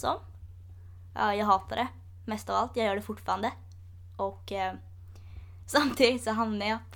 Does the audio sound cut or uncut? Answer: uncut